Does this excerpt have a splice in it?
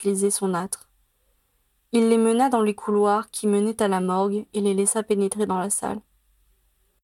no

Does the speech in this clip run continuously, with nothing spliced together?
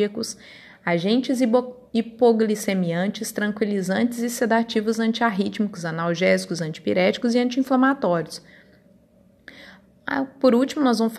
yes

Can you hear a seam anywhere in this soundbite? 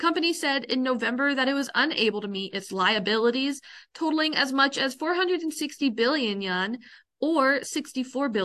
no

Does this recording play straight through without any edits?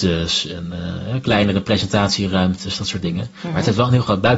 yes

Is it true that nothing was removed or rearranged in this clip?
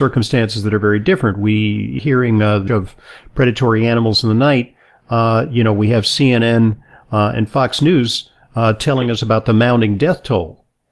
no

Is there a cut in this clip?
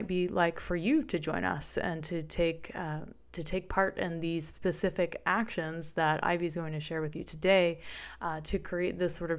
no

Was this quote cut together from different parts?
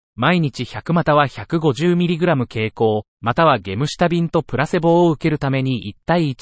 yes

